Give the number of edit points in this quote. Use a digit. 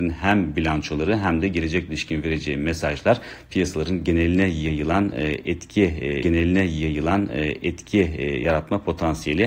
2